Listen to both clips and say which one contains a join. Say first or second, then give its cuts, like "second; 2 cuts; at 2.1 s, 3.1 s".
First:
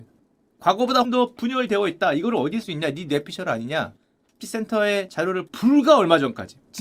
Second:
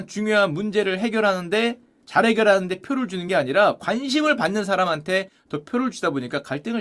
first; 4 cuts; at 1.0 s, 2.6 s, 4.4 s, 5.5 s